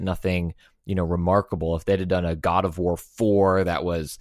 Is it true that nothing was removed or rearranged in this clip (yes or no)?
yes